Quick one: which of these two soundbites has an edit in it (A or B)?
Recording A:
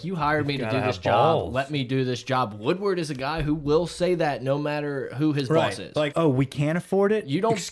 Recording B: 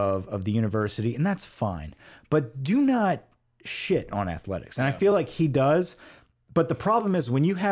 A